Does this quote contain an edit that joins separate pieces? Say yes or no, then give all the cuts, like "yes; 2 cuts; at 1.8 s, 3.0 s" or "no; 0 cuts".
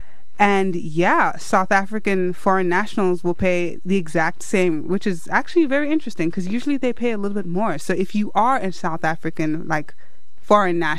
no; 0 cuts